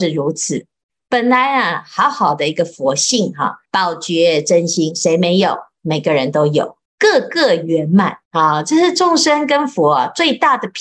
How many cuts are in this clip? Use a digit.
3